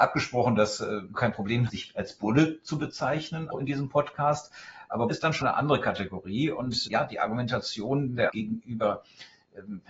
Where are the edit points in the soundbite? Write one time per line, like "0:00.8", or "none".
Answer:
0:01.1
0:01.7
0:03.5
0:05.1
0:05.4
0:06.9
0:08.3